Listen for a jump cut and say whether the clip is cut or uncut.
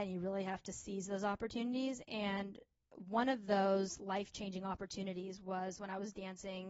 uncut